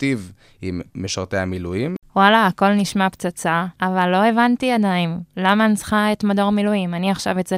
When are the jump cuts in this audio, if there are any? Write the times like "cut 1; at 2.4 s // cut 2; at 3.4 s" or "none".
cut 1; at 3.8 s